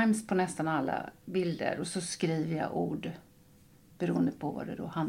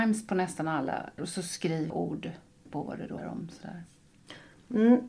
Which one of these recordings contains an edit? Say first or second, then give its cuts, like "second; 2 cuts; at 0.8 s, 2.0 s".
second; 4 cuts; at 1.2 s, 1.9 s, 2.7 s, 3.2 s